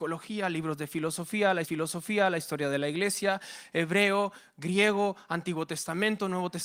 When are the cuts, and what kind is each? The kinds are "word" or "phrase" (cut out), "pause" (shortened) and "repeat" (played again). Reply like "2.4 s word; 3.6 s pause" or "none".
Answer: 1.6 s repeat